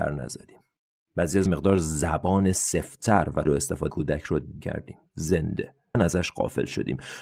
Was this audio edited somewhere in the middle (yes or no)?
yes